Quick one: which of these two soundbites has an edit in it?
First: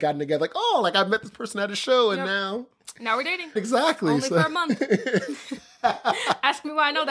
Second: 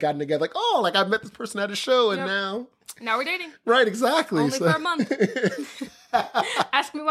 first; 1 cut; at 3.6 s

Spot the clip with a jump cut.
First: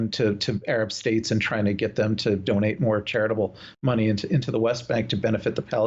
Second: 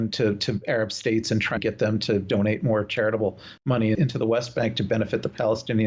second; 2 cuts; at 1.6 s, 3.9 s

